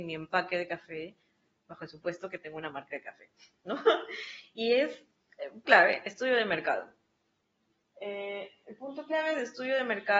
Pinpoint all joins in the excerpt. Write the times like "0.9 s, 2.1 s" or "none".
5.7 s